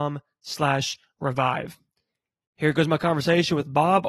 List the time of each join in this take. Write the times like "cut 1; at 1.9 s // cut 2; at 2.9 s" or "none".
none